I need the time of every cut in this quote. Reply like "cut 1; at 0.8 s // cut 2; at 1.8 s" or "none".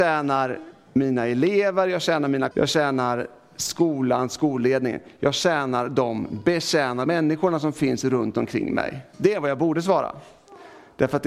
cut 1; at 2.5 s // cut 2; at 7.1 s // cut 3; at 9.1 s